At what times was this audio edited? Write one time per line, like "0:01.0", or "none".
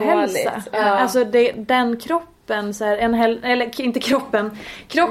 none